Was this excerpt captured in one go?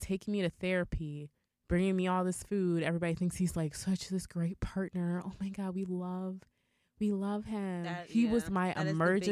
yes; 0 cuts

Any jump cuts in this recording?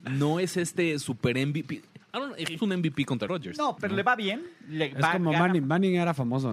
yes; 3 cuts; at 2.6 s, 3.3 s, 3.8 s

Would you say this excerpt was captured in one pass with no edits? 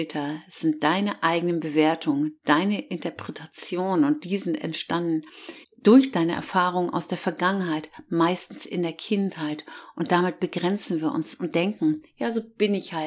no; 1 cut; at 5.6 s

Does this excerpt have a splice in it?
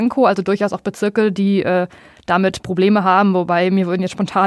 no; 0 cuts

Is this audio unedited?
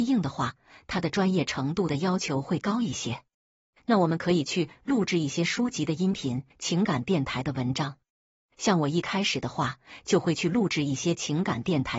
no; 1 cut; at 6.5 s

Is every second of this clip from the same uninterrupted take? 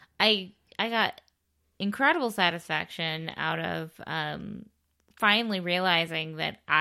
no; 1 cut; at 5.0 s

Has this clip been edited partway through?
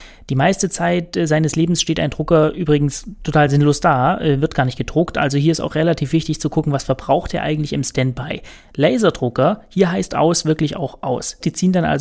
no; 0 cuts

